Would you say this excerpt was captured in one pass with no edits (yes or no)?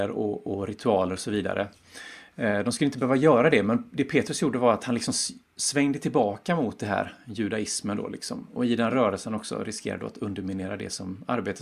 yes